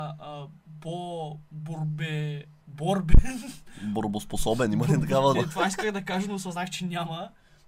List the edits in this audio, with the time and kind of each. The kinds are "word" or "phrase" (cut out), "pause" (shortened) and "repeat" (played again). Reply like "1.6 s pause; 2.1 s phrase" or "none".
2.6 s pause; 5.3 s word